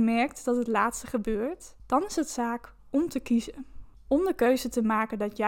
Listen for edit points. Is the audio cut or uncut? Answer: cut